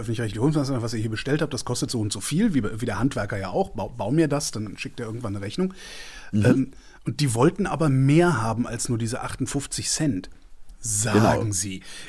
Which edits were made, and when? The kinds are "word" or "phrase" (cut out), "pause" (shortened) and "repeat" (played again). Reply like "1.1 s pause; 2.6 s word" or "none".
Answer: 1.9 s word

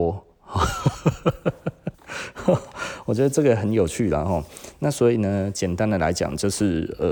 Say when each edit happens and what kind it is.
1.9 s pause

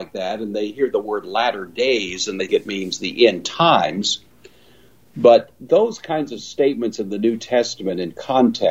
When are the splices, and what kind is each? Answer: 2.5 s word

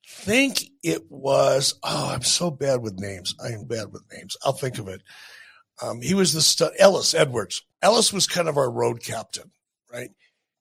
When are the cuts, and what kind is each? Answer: 3.6 s word; 7.7 s pause

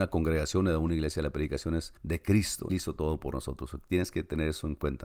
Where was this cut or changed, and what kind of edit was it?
2.0 s pause; 2.7 s word

